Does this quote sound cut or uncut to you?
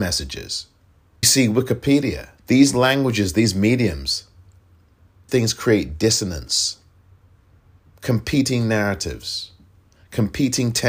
cut